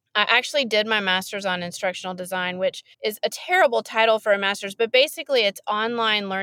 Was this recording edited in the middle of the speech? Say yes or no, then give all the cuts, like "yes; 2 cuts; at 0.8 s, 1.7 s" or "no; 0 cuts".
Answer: yes; 1 cut; at 2.9 s